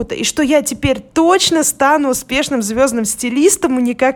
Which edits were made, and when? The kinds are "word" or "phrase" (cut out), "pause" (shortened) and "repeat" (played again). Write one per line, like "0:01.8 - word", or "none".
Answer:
none

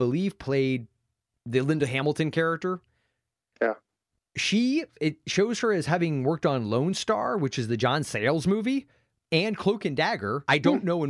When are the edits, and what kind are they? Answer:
none

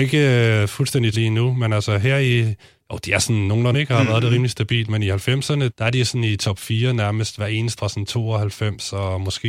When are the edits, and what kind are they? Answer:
0:01.1 - word
0:02.7 - pause
0:03.7 - phrase
0:05.7 - word
0:07.8 - word

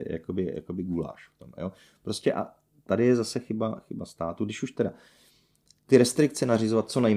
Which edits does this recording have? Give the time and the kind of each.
none

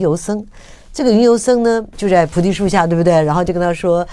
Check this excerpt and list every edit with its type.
0:01.9 - word

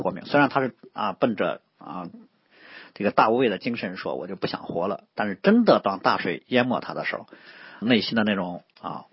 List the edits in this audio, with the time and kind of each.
0:07.8 - word

